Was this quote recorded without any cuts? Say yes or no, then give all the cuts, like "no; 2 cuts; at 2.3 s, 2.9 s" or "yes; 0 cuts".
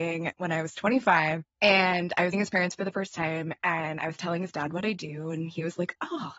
no; 2 cuts; at 1.5 s, 2.3 s